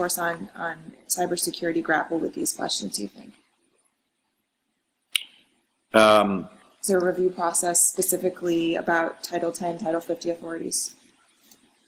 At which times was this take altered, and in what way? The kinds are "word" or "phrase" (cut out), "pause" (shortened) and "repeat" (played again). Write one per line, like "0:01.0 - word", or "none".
none